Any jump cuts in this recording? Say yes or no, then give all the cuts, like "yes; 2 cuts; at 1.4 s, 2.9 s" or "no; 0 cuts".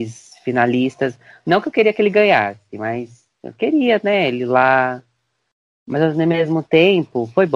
no; 0 cuts